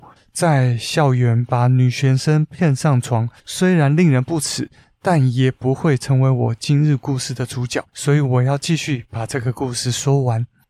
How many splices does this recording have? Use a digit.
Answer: 2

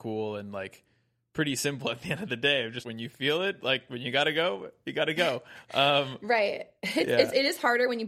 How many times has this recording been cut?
1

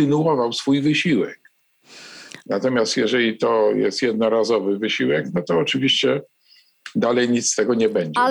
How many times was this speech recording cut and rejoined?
0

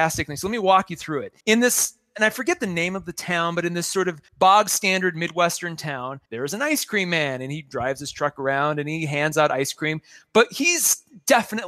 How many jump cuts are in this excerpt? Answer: 3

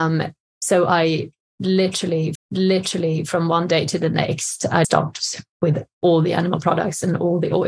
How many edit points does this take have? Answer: 2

